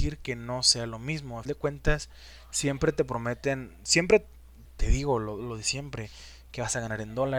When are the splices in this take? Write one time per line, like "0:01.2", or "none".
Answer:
0:01.5
0:04.7